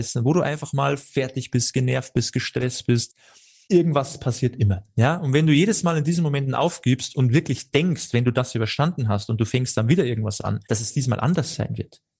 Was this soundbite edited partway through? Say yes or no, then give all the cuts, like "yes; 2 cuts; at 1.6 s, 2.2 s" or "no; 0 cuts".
yes; 2 cuts; at 3.6 s, 10.6 s